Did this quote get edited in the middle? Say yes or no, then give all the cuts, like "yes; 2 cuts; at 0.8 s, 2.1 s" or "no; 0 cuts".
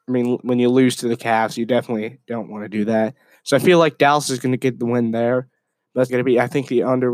yes; 1 cut; at 6.1 s